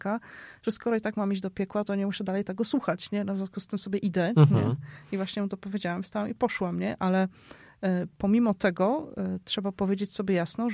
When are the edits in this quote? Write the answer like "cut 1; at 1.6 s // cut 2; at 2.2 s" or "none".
none